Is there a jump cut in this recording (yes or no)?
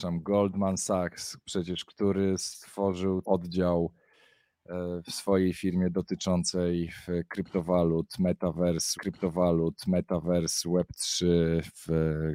yes